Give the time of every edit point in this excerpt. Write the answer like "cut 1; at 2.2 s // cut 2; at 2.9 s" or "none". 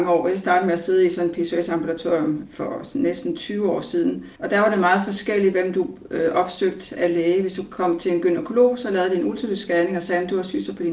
cut 1; at 4.4 s